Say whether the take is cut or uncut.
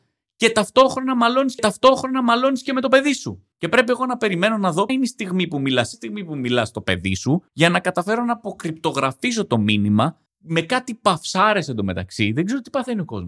cut